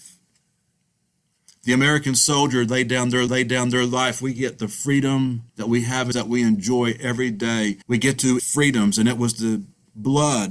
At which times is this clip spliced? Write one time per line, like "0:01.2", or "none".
0:03.3
0:05.5
0:06.1
0:07.8
0:08.4